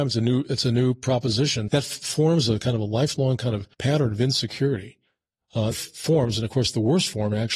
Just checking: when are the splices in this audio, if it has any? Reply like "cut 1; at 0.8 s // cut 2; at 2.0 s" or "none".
cut 1; at 1.7 s // cut 2; at 3.7 s // cut 3; at 5.7 s